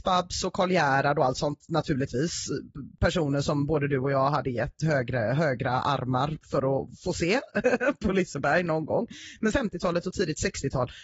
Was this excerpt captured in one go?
no; 1 cut; at 9.5 s

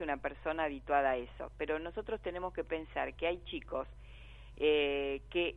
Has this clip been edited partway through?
no; 0 cuts

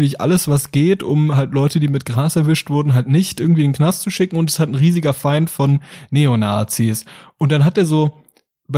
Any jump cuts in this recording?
no; 0 cuts

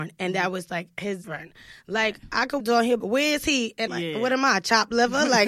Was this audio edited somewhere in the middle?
yes; 4 cuts; at 1.2 s, 2.6 s, 3.0 s, 3.9 s

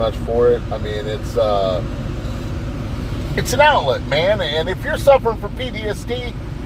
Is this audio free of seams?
yes; 0 cuts

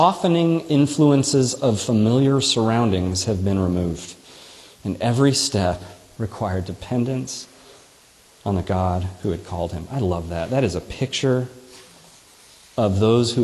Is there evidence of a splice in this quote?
no; 0 cuts

